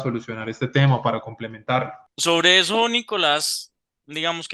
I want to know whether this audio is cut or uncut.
cut